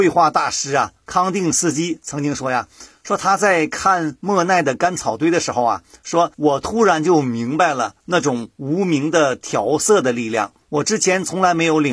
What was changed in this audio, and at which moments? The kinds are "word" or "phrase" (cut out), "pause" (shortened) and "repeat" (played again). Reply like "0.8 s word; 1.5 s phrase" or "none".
6.3 s pause; 8.0 s pause; 10.6 s pause